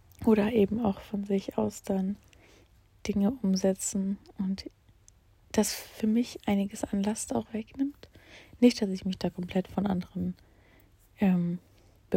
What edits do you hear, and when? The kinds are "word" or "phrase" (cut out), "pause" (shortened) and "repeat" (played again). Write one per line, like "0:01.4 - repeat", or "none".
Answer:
none